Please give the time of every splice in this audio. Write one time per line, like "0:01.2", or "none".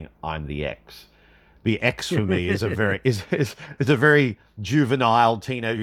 none

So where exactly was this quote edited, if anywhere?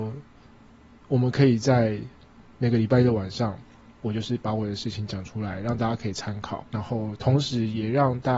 0:06.7

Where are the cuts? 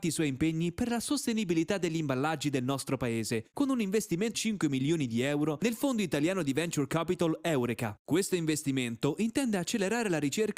0:04.3

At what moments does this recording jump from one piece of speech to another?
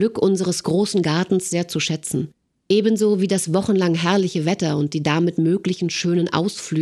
none

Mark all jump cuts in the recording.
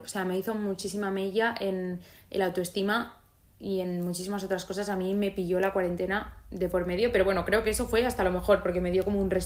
none

